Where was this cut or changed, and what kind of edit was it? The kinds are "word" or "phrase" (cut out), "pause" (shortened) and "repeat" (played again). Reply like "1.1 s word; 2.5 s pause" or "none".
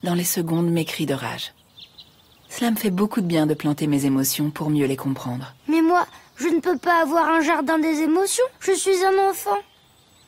5.6 s pause; 8.5 s pause